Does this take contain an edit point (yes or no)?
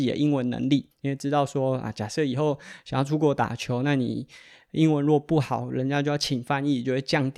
yes